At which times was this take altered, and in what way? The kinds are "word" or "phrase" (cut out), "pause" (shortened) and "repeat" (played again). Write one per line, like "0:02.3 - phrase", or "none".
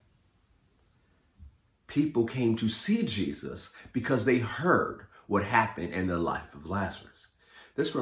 none